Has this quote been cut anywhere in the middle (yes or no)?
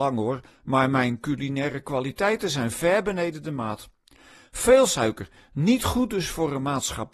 no